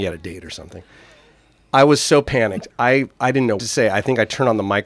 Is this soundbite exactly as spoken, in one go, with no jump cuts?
no; 1 cut; at 3.6 s

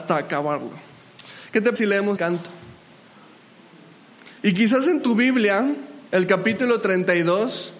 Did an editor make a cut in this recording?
yes; 4 cuts; at 1.8 s, 2.2 s, 4.4 s, 6.1 s

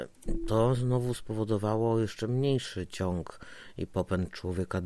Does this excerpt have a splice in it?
no; 0 cuts

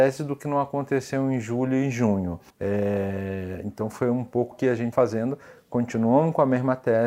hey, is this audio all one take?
no; 3 cuts; at 2.5 s, 4.5 s, 4.9 s

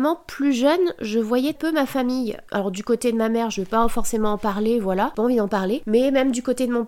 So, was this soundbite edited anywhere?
yes; 1 cut; at 1.5 s

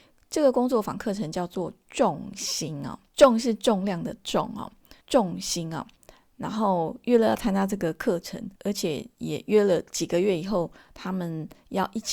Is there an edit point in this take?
yes; 3 cuts; at 3.1 s, 5.0 s, 8.6 s

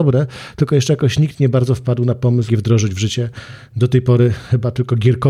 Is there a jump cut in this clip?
yes; 1 cut; at 2.5 s

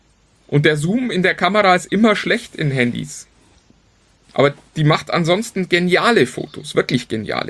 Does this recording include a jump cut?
no; 0 cuts

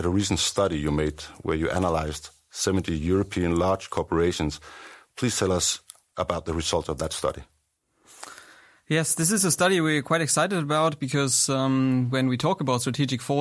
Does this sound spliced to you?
no; 0 cuts

